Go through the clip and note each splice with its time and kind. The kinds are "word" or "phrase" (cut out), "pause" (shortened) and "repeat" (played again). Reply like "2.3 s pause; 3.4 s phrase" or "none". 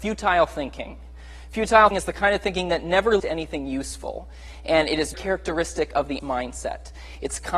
1.9 s word; 3.2 s word; 5.1 s word; 6.2 s word